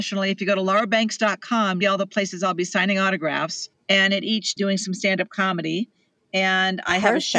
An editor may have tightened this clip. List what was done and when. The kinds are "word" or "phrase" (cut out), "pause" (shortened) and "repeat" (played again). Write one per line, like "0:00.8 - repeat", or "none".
0:01.8 - phrase
0:03.7 - pause
0:04.6 - phrase